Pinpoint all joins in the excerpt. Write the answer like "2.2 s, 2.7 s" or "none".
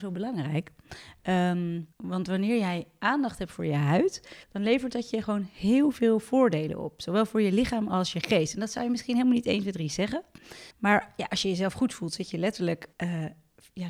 1.9 s, 4.4 s, 10.7 s, 12.9 s

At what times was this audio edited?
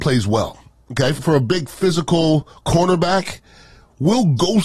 1.2 s, 2.5 s

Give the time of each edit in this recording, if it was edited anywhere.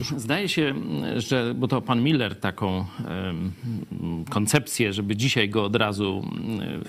none

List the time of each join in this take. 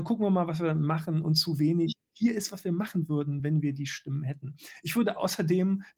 none

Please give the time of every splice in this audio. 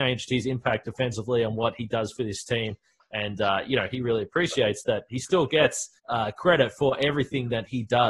6.0 s

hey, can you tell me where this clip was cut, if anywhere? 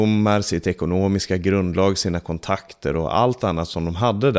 none

